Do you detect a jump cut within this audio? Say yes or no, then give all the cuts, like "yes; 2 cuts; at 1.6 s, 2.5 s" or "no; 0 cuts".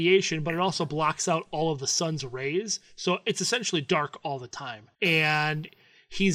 yes; 1 cut; at 4.9 s